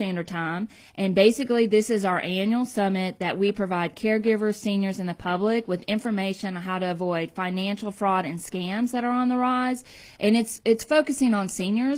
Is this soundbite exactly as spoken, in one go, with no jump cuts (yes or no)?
yes